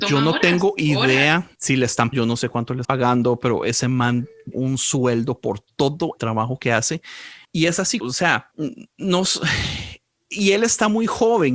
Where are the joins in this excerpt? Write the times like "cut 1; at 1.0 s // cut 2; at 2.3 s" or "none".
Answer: cut 1; at 2.1 s // cut 2; at 2.8 s // cut 3; at 4.5 s // cut 4; at 6.2 s // cut 5; at 8.0 s